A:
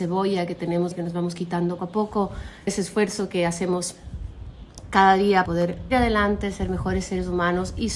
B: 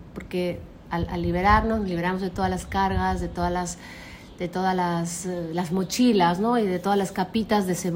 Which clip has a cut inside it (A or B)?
A